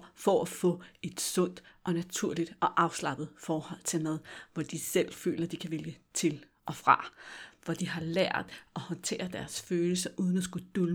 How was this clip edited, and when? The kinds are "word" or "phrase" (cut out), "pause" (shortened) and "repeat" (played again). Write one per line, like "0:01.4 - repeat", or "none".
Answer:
none